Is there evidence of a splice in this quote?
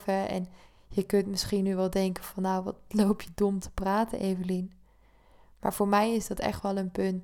no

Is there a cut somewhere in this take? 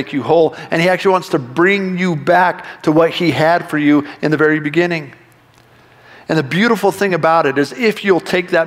no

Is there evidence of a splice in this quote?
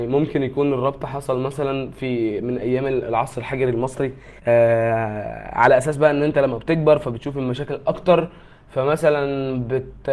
yes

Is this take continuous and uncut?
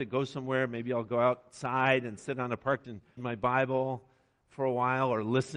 no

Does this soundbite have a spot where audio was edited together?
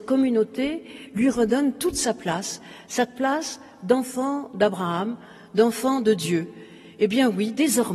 no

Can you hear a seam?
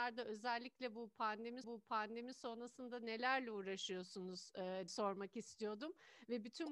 yes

